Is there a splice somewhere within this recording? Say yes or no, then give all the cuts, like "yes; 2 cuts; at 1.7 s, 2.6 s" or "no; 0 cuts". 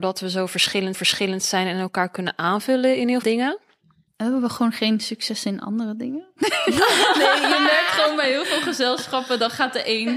yes; 2 cuts; at 0.9 s, 3.2 s